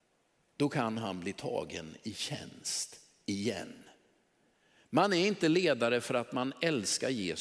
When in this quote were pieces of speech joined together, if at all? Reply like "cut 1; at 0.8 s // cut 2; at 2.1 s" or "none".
none